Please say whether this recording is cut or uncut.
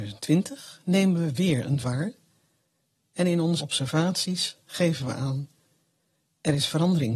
cut